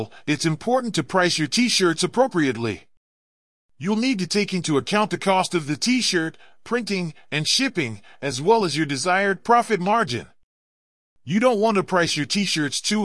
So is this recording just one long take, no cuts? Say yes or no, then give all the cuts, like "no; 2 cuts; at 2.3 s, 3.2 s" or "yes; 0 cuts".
yes; 0 cuts